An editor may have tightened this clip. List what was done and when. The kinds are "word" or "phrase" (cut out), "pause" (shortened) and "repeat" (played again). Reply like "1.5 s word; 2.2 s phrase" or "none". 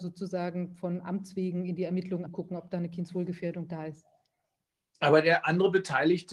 2.3 s word